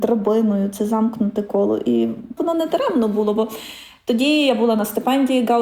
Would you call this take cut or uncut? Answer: cut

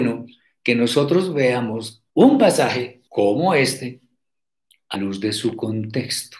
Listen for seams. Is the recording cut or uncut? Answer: cut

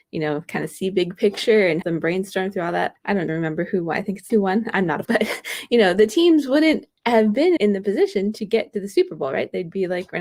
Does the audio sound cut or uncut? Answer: cut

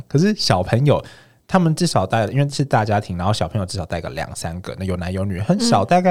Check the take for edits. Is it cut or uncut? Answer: uncut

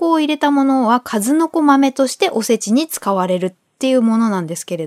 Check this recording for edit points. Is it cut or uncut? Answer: uncut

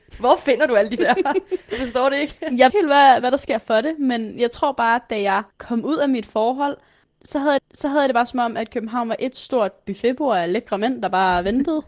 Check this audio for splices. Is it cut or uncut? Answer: cut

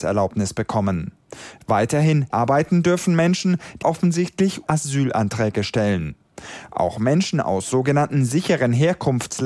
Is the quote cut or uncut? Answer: cut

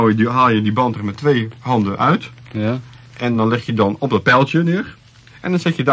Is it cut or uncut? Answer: uncut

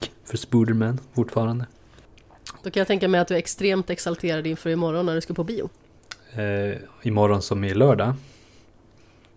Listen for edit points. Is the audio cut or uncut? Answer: cut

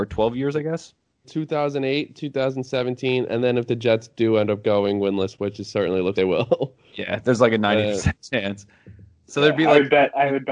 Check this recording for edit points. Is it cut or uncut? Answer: cut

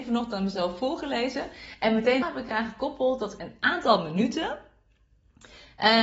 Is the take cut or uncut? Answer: cut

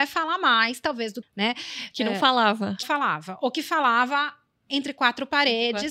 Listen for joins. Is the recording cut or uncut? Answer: cut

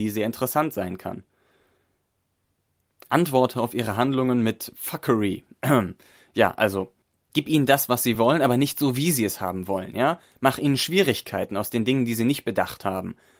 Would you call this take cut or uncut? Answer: uncut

